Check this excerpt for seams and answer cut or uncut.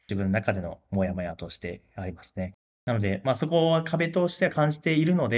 uncut